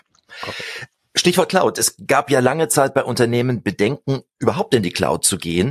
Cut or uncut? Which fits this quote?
uncut